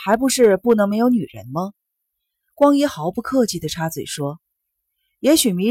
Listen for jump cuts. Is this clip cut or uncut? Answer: uncut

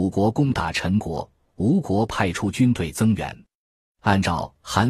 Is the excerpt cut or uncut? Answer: uncut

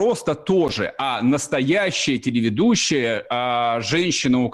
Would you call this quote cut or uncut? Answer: uncut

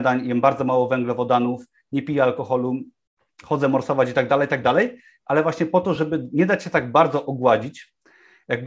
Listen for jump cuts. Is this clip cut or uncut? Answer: uncut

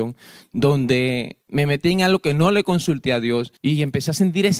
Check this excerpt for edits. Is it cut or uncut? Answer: cut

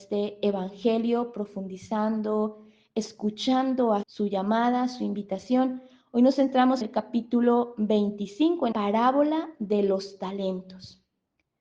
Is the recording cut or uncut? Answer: cut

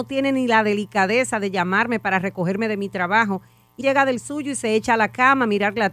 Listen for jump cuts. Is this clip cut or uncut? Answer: cut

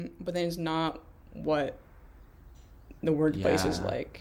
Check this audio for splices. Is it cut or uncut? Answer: cut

